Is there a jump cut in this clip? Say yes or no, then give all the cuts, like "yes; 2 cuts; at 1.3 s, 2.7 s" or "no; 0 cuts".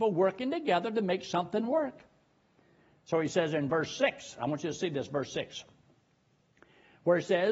no; 0 cuts